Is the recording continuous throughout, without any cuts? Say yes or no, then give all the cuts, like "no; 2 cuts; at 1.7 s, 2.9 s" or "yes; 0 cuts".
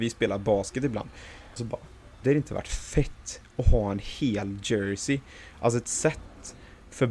no; 2 cuts; at 1.6 s, 2.2 s